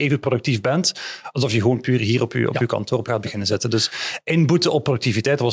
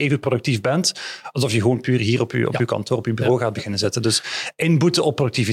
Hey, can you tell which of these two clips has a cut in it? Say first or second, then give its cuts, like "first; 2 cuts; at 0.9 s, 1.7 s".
first; 1 cut; at 3.1 s